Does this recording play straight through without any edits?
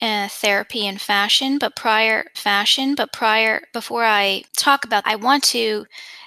no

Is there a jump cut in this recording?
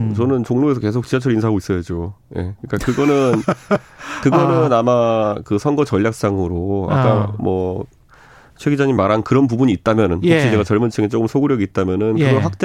no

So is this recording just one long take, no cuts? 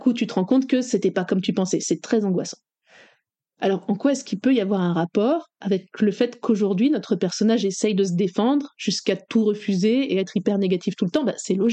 yes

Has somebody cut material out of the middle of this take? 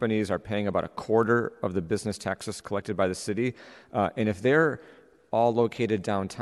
no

